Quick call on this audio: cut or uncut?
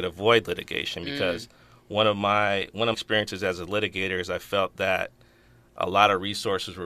cut